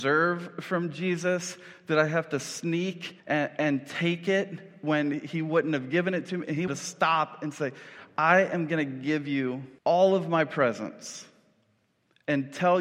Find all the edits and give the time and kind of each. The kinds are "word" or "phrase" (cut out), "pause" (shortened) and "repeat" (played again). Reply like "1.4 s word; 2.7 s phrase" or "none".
3.2 s pause; 6.7 s word; 9.8 s pause